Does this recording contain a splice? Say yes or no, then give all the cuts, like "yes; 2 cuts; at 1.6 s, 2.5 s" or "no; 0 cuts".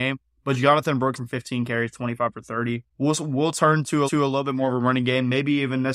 yes; 4 cuts; at 1.1 s, 1.9 s, 2.9 s, 4.1 s